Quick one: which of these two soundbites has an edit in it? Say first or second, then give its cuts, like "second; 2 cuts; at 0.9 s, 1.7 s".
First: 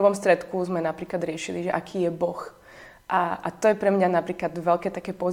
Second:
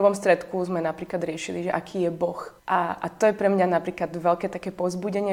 second; 1 cut; at 2.6 s